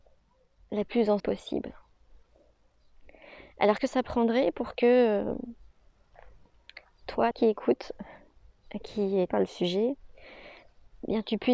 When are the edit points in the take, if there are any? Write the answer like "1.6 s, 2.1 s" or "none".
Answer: 1.2 s, 3.8 s, 7.3 s, 9.3 s